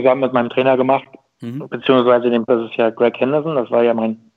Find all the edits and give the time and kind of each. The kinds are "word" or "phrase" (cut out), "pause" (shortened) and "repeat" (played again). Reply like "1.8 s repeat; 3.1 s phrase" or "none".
2.5 s word